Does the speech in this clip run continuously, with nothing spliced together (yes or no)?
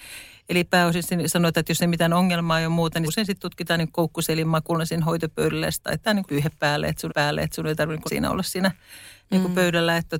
no